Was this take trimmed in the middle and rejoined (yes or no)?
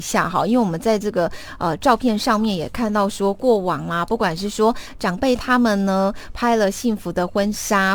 no